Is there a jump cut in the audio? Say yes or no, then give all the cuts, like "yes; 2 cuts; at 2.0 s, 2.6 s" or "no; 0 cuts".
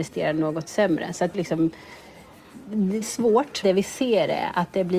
yes; 3 cuts; at 1.3 s, 3.0 s, 3.6 s